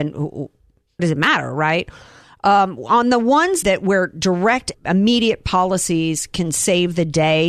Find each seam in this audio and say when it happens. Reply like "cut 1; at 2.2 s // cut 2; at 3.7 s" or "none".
cut 1; at 1.0 s // cut 2; at 3.6 s // cut 3; at 4.7 s